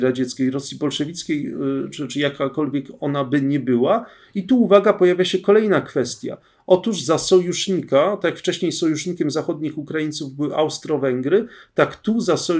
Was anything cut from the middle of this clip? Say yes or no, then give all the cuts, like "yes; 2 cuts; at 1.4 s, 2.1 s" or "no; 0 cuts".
no; 0 cuts